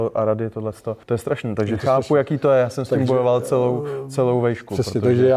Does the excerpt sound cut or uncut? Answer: cut